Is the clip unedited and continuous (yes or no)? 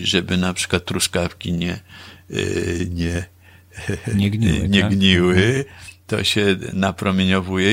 yes